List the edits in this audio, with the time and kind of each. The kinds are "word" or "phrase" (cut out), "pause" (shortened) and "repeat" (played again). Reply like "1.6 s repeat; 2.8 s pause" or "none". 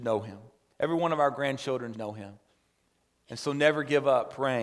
1.9 s word